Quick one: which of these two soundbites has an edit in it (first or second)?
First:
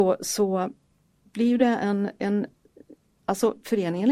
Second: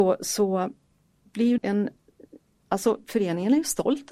second